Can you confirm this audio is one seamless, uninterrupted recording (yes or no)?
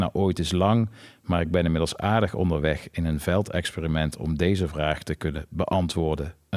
yes